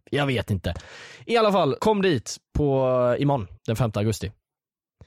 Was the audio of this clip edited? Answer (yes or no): yes